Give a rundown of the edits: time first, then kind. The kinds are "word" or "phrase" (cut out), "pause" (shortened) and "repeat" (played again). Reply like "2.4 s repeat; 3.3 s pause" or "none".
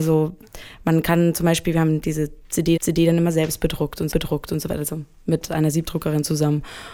2.8 s repeat; 4.1 s repeat